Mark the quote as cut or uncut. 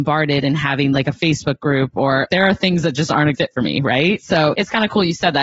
cut